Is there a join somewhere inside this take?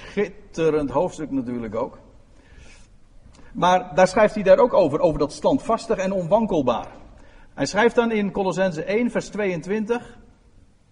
no; 0 cuts

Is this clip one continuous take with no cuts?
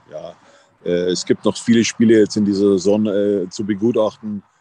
yes; 0 cuts

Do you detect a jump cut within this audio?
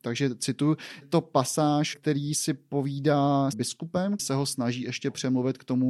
yes; 4 cuts; at 1.0 s, 1.9 s, 3.5 s, 4.2 s

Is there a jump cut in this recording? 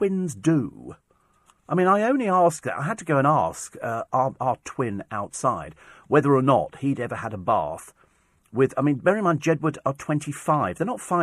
no; 0 cuts

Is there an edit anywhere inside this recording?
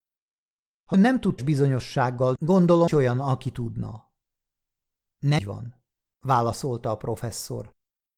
yes; 5 cuts; at 0.9 s, 1.4 s, 2.4 s, 2.9 s, 5.4 s

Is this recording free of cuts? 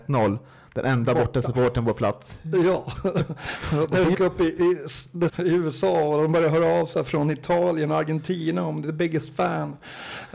no; 2 cuts; at 4.1 s, 5.3 s

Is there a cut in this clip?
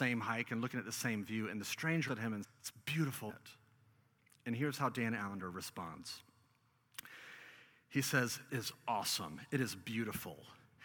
yes; 4 cuts; at 2.1 s, 2.4 s, 3.3 s, 8.5 s

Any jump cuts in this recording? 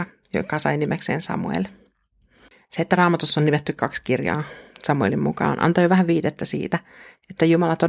no; 0 cuts

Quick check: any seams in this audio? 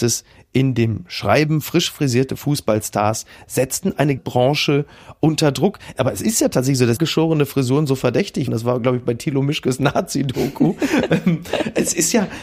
yes; 3 cuts; at 4.2 s, 7.0 s, 8.5 s

